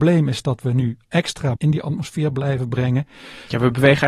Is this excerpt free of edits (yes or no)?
no